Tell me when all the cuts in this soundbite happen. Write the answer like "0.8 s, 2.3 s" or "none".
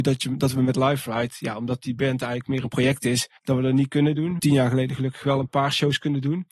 3.4 s, 4.4 s